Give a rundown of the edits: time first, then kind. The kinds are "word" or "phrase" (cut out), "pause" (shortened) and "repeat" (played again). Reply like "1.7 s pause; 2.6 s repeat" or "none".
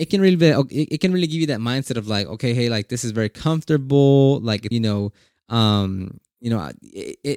4.7 s phrase